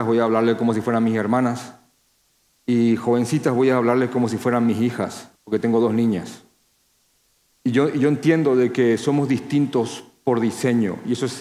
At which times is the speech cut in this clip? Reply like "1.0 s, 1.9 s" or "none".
5.4 s